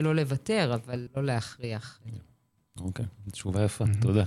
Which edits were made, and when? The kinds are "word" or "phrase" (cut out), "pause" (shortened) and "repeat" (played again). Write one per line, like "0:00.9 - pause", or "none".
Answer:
0:01.1 - word